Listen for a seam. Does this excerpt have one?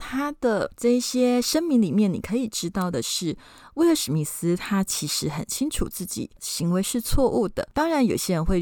no; 0 cuts

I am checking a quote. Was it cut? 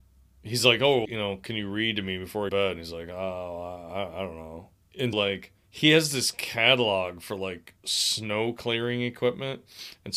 yes; 5 cuts; at 1.0 s, 2.5 s, 5.1 s, 5.6 s, 7.8 s

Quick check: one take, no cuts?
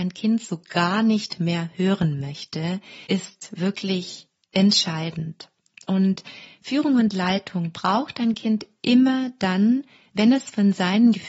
no; 1 cut; at 3.1 s

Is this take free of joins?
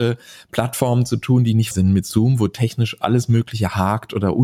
no; 1 cut; at 1.7 s

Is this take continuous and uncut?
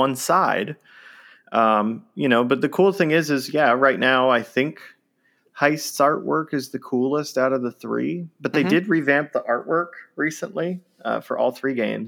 yes; 0 cuts

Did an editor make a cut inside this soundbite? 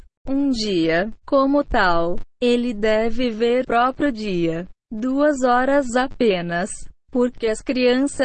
yes; 3 cuts; at 1.2 s, 3.6 s, 4.8 s

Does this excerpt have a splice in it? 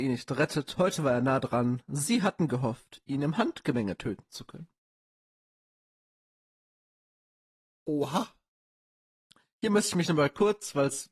no; 0 cuts

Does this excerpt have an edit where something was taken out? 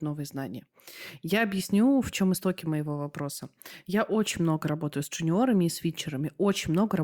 no; 0 cuts

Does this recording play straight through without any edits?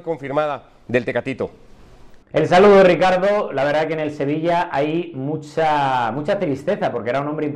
no; 1 cut; at 2.2 s

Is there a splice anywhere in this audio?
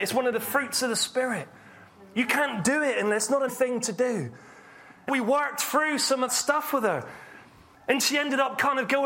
yes; 3 cuts; at 3.5 s, 5.1 s, 6.3 s

